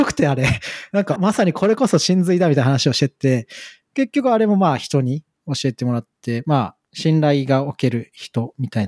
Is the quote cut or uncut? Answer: cut